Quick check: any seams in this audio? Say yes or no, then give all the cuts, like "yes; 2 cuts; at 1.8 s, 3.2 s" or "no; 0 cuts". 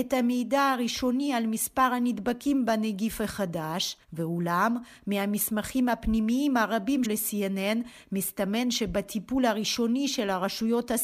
yes; 2 cuts; at 4.0 s, 7.0 s